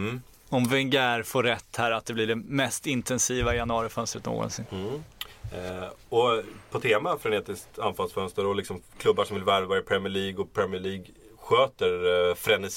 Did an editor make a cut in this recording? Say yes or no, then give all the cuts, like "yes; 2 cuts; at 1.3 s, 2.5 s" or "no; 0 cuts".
no; 0 cuts